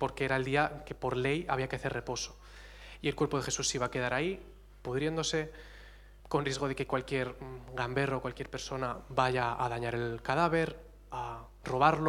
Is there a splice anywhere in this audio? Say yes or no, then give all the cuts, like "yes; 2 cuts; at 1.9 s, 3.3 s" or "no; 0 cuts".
yes; 1 cut; at 6.2 s